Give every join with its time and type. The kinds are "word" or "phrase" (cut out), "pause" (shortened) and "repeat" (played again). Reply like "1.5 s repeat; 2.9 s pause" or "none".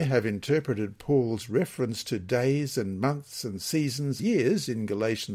4.2 s word